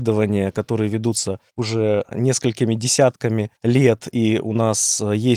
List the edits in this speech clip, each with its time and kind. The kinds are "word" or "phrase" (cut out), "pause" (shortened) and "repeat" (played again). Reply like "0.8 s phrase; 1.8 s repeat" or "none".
1.5 s pause; 3.6 s pause

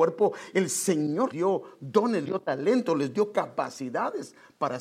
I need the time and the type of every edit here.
1.3 s word; 2.2 s word

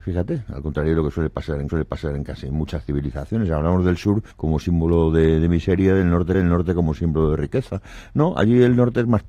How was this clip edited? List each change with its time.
1.7 s repeat; 4.3 s pause; 6.3 s repeat

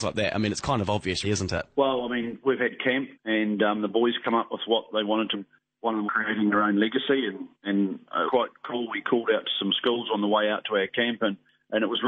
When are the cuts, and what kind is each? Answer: 1.2 s word; 1.7 s pause; 3.1 s pause; 5.3 s phrase; 6.1 s word; 7.5 s pause; 8.3 s word

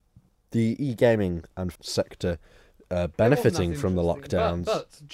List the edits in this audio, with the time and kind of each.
1.7 s word

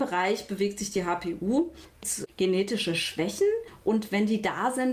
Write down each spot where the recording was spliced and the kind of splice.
2.0 s word

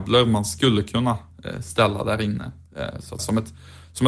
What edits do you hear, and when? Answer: 3.2 s word

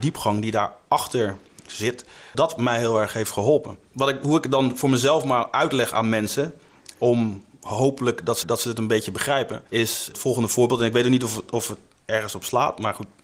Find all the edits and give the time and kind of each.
2.3 s word; 3.9 s pause; 8.4 s repeat; 9.7 s pause

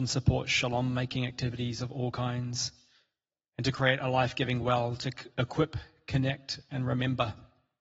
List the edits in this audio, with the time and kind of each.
none

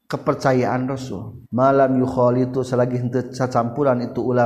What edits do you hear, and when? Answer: 1.5 s pause

